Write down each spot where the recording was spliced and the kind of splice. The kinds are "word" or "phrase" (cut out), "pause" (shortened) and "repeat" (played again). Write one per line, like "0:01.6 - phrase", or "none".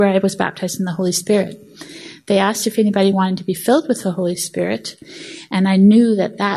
none